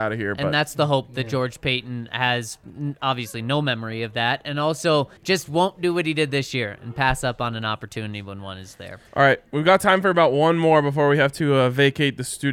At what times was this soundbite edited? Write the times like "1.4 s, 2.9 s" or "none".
5.2 s, 9.1 s